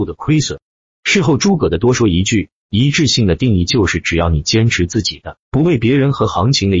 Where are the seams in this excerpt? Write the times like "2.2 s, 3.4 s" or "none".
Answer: 5.4 s